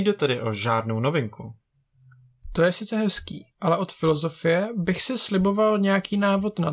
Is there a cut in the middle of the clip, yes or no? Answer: yes